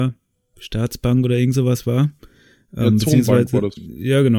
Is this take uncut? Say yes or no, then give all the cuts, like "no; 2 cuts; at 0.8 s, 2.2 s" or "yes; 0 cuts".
yes; 0 cuts